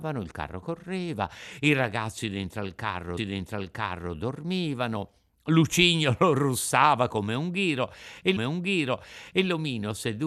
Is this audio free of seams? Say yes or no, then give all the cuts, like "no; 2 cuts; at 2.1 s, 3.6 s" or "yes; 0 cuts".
no; 2 cuts; at 3.2 s, 8.4 s